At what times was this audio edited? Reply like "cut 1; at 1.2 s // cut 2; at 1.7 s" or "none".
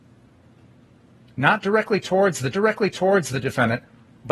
cut 1; at 2.5 s